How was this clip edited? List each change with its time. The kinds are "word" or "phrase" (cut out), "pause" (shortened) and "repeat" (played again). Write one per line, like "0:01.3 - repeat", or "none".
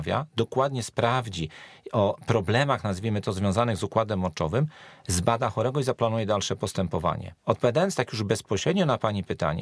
0:07.4 - pause